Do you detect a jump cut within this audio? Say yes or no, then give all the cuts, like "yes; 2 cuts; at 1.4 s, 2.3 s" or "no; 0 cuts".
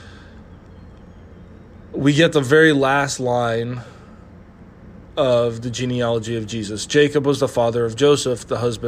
no; 0 cuts